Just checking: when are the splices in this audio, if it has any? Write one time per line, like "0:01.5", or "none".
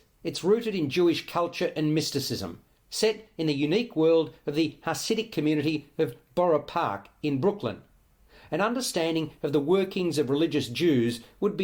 none